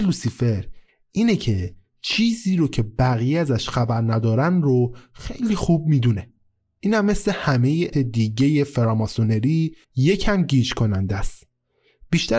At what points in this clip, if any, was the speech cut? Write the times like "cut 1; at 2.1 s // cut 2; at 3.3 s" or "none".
cut 1; at 7.9 s // cut 2; at 9.8 s